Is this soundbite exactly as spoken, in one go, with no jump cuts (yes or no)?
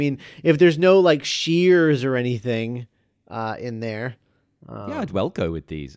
yes